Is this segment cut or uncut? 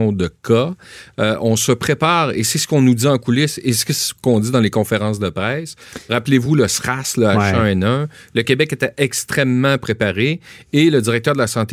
uncut